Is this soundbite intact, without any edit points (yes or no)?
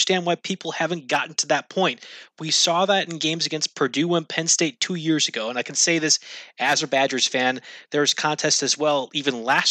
yes